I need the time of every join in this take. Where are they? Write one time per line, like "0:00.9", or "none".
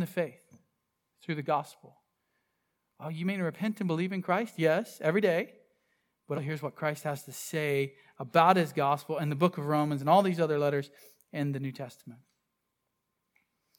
0:06.3